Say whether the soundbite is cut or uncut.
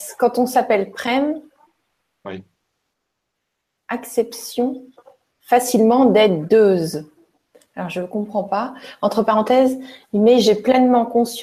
uncut